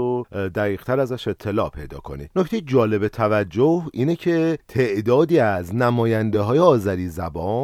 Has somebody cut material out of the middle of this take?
no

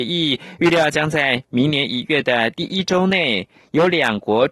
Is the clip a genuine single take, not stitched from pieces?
yes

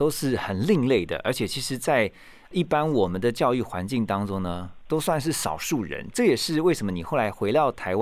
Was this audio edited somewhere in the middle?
no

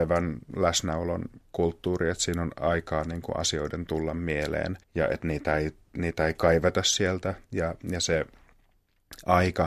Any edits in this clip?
yes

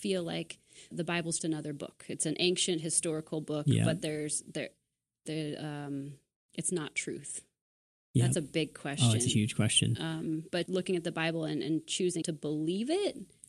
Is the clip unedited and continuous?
no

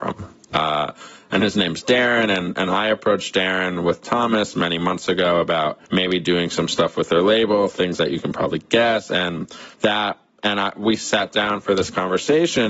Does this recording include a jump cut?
yes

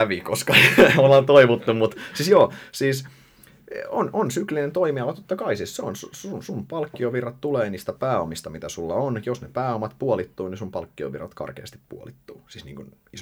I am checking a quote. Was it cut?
no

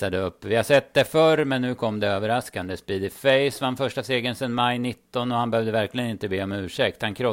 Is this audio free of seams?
yes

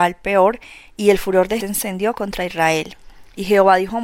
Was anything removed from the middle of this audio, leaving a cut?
yes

